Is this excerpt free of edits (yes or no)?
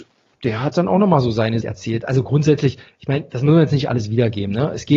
no